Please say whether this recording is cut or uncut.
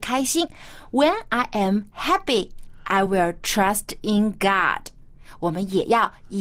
uncut